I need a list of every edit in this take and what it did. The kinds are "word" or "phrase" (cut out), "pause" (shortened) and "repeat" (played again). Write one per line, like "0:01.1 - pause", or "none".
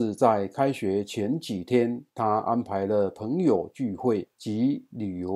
0:02.1 - pause